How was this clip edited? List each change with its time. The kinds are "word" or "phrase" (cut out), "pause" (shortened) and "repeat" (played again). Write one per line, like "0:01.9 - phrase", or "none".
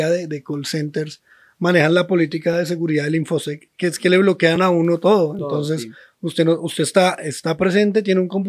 none